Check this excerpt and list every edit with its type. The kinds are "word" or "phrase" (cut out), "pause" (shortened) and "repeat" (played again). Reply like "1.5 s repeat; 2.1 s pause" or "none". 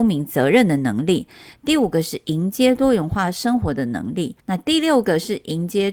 4.4 s pause